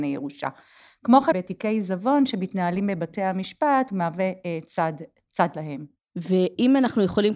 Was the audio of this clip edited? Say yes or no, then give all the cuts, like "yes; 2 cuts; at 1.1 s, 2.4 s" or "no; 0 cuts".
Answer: yes; 1 cut; at 1.3 s